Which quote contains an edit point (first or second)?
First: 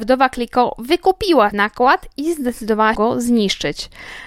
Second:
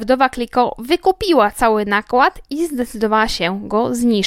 first